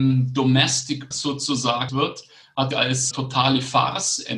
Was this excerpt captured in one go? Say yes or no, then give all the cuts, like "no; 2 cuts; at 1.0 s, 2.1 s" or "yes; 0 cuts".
no; 4 cuts; at 1.1 s, 1.9 s, 2.7 s, 3.1 s